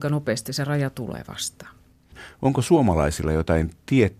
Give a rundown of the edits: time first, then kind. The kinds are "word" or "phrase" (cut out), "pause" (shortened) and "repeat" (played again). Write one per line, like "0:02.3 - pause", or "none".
none